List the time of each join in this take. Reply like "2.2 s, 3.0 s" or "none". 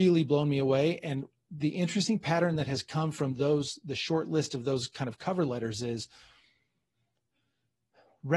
none